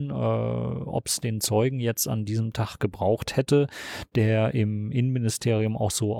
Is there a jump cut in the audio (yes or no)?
no